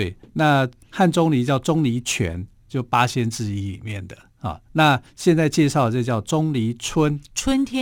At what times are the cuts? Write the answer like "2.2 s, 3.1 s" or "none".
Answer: 4.6 s